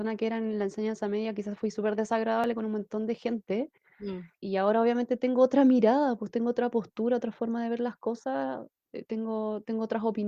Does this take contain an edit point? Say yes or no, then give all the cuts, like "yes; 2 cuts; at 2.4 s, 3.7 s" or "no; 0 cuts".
no; 0 cuts